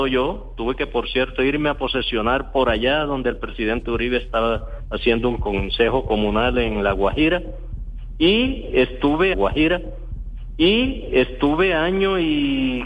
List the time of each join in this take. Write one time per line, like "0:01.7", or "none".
0:09.3